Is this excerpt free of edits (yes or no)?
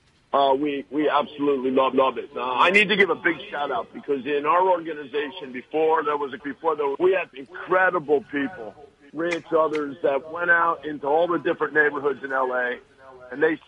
no